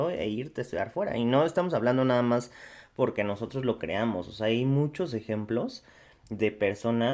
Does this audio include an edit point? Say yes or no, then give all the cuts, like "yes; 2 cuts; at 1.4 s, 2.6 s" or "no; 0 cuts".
no; 0 cuts